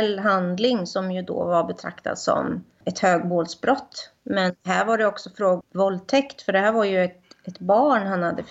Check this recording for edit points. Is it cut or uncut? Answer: cut